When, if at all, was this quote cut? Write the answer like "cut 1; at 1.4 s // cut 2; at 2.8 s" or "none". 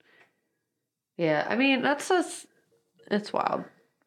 none